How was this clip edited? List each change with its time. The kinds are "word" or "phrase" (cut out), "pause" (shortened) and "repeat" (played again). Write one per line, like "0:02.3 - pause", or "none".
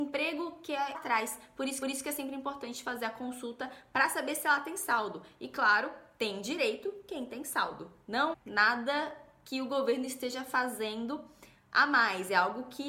0:00.9 - phrase
0:01.8 - repeat
0:08.3 - word